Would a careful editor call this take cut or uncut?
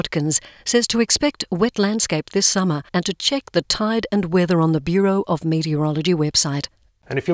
cut